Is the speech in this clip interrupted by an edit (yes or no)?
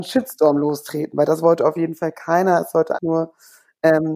yes